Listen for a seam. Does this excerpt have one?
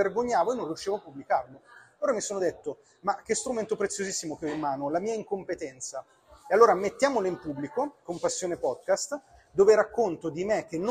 no; 0 cuts

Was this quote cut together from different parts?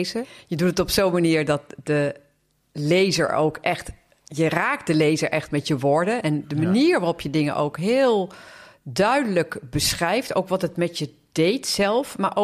no; 0 cuts

